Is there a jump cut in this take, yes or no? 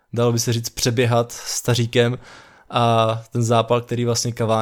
no